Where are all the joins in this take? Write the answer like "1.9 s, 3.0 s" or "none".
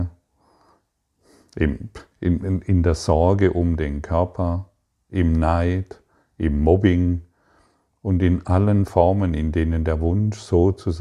2.1 s